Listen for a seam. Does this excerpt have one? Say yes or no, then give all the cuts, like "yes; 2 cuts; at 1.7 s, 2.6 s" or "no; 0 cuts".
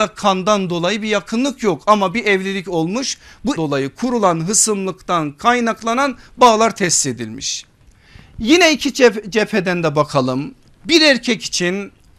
yes; 1 cut; at 3.6 s